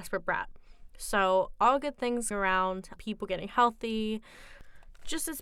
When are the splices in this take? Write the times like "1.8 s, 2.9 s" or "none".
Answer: 2.3 s, 3.0 s

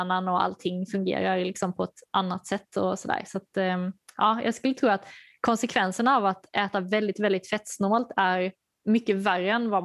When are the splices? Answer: 4.0 s

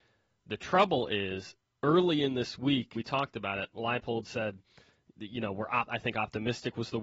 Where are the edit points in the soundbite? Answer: 2.9 s

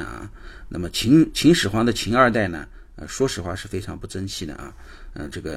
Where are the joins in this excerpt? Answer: none

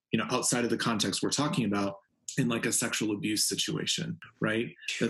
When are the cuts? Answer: none

